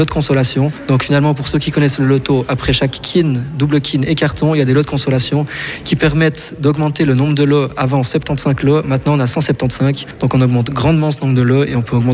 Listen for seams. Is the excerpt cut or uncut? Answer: uncut